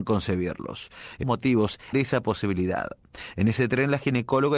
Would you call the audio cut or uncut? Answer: cut